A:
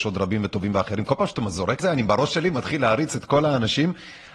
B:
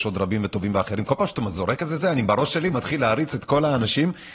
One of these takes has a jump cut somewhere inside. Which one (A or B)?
A